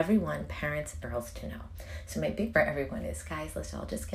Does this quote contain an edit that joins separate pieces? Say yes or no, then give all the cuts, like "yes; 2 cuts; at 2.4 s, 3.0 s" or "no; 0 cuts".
yes; 2 cuts; at 1.0 s, 2.5 s